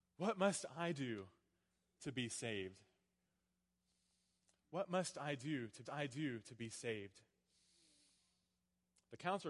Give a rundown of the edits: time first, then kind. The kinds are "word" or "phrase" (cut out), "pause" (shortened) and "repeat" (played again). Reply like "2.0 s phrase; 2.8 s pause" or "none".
5.8 s repeat